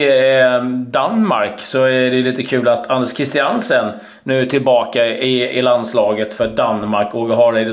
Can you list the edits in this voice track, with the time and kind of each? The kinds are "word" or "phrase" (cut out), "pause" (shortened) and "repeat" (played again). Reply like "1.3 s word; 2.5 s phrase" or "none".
none

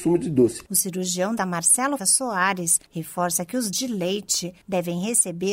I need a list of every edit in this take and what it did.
1.4 s word; 2.0 s word; 2.9 s pause; 3.7 s word; 4.6 s pause

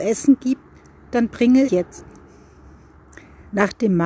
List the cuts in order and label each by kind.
1.7 s word

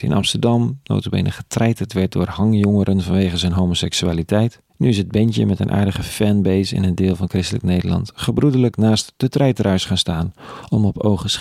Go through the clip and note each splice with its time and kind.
4.7 s pause

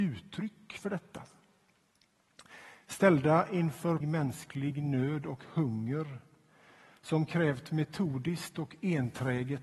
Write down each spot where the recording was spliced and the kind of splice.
4.0 s word

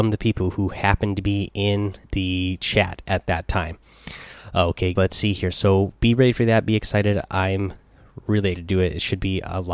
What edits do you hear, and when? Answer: 2.0 s pause; 5.0 s word; 8.5 s word

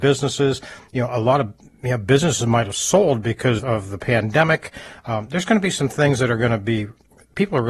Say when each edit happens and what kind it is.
3.6 s word

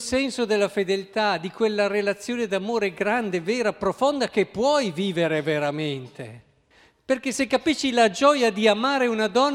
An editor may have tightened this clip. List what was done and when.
6.7 s pause

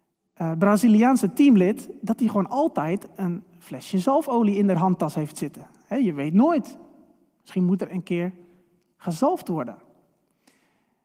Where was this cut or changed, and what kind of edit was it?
none

